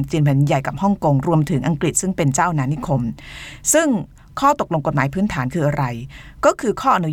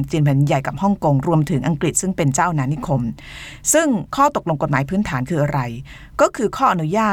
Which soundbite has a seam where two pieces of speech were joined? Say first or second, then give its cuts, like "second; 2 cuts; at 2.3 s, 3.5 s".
second; 1 cut; at 4.1 s